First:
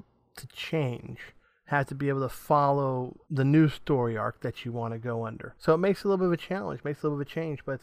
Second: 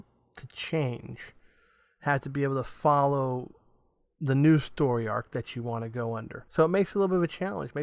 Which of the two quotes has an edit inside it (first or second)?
first